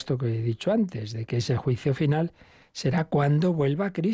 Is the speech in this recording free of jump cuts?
yes; 0 cuts

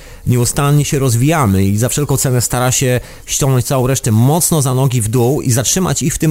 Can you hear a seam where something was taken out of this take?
no; 0 cuts

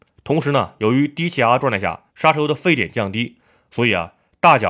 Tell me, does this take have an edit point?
yes; 1 cut; at 2.1 s

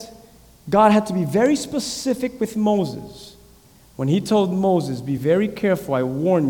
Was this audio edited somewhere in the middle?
no; 0 cuts

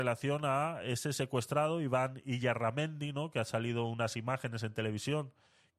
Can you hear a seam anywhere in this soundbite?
no; 0 cuts

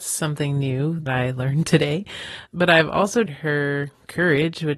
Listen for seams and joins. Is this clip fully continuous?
no; 3 cuts; at 1.1 s, 2.5 s, 3.3 s

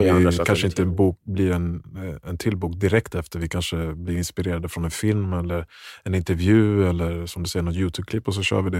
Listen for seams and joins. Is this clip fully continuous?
yes; 0 cuts

